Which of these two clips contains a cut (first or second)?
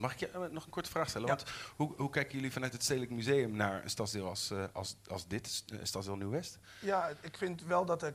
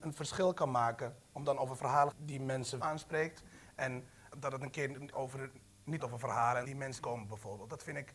second